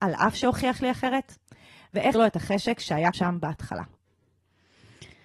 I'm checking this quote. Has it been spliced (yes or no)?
yes